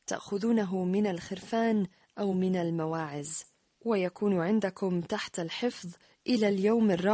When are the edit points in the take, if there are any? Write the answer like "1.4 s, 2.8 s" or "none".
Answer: none